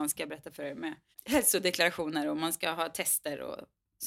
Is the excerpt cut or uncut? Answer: cut